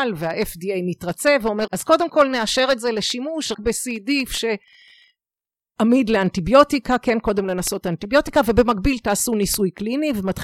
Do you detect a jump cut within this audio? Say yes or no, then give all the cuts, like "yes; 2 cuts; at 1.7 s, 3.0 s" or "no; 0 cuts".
yes; 2 cuts; at 1.7 s, 3.5 s